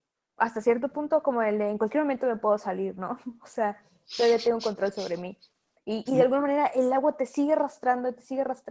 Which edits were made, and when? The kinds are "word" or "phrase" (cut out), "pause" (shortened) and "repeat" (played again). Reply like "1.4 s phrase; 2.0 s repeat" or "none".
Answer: 6.1 s word